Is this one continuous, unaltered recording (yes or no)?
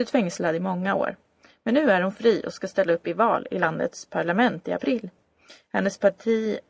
yes